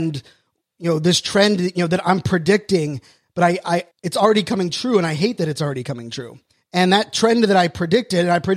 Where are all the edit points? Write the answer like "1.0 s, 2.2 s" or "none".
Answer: 3.9 s, 6.5 s